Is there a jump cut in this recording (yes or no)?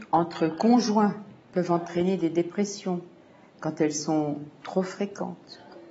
no